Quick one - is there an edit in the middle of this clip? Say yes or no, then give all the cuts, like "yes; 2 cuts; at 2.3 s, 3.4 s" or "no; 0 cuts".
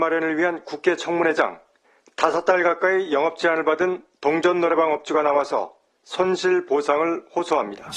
no; 0 cuts